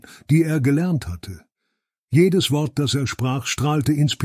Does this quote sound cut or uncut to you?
uncut